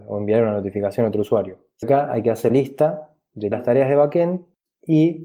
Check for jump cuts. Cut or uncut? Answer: cut